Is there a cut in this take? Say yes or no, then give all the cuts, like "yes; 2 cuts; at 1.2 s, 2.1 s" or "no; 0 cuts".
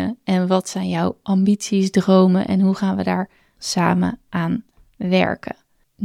yes; 1 cut; at 3.6 s